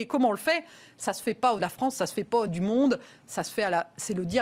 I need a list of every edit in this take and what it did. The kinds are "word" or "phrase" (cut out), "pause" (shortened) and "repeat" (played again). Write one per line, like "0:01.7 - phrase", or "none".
0:01.6 - word
0:02.5 - word